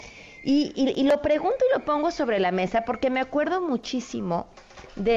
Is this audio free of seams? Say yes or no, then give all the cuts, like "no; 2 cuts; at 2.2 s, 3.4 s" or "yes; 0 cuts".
yes; 0 cuts